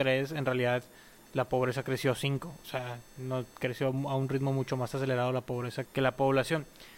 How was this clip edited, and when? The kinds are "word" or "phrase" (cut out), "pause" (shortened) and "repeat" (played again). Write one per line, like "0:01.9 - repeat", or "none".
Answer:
0:03.5 - pause
0:05.9 - word